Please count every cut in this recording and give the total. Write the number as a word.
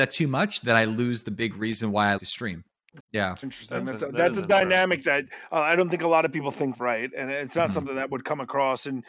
four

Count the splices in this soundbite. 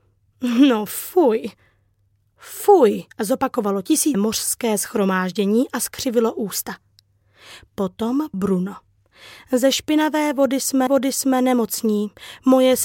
four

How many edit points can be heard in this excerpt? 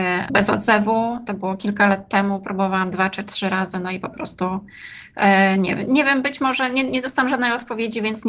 zero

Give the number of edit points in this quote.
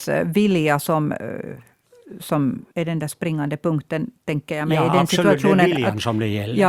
one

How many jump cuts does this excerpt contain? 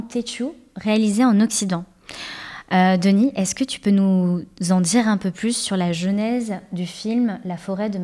zero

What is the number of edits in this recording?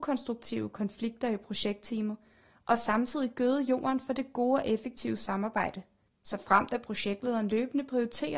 zero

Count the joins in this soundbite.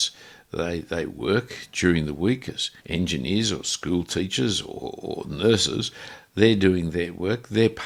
one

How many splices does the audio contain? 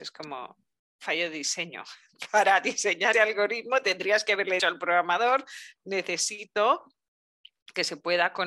two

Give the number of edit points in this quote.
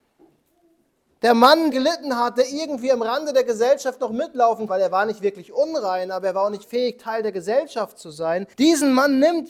four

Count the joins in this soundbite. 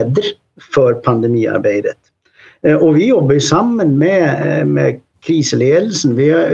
zero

